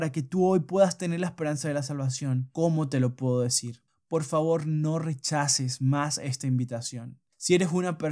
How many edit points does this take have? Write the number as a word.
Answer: zero